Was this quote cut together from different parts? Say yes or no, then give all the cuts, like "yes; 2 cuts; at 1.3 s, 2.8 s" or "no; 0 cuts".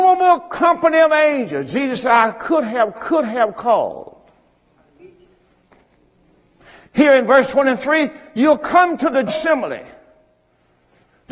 yes; 2 cuts; at 2.9 s, 9.3 s